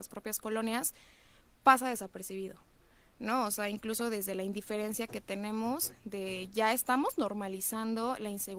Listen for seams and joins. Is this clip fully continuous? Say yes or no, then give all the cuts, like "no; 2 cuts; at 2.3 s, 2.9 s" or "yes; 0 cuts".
yes; 0 cuts